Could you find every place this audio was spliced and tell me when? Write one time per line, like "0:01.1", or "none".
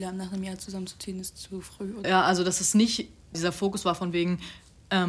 0:02.0
0:03.3